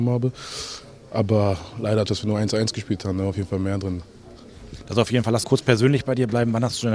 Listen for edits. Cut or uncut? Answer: cut